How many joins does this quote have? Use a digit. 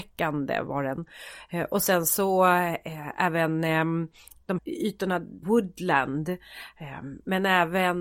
2